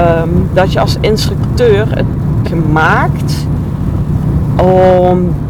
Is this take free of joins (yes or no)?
no